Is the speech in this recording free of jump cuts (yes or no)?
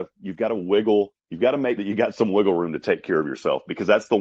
no